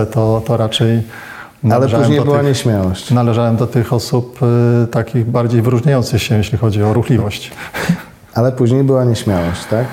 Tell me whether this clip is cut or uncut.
uncut